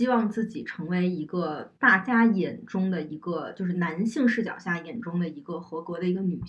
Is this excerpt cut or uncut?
cut